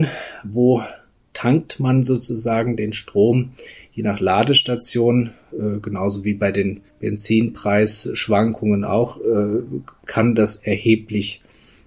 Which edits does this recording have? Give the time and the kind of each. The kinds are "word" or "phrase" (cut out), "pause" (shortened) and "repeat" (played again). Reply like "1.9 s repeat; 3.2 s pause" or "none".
6.9 s pause